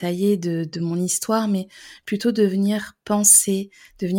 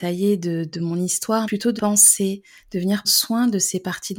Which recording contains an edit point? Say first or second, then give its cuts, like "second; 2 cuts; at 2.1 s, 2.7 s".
second; 3 cuts; at 1.4 s, 1.8 s, 3.0 s